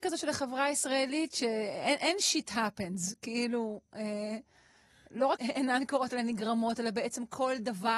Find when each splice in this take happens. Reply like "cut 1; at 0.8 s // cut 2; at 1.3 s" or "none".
cut 1; at 5.4 s